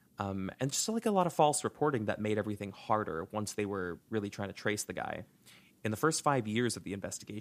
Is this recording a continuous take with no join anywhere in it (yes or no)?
yes